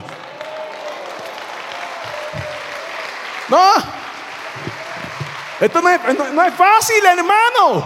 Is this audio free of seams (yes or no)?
yes